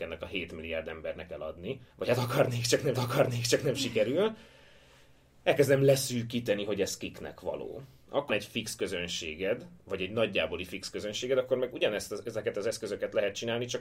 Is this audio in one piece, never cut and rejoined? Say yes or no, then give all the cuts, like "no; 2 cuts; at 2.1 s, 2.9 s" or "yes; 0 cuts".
no; 3 cuts; at 1.9 s, 3.0 s, 8.3 s